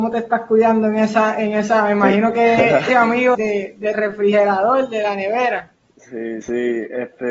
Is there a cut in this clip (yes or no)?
yes